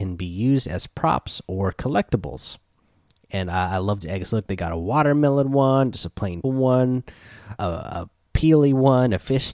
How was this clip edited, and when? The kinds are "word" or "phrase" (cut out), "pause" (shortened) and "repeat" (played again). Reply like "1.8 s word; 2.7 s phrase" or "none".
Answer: 4.0 s phrase; 6.4 s word; 7.6 s word